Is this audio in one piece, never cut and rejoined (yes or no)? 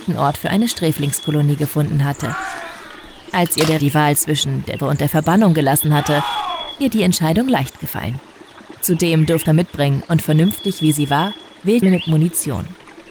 no